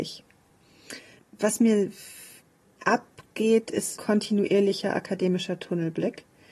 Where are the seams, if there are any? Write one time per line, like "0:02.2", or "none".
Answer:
0:02.4
0:04.0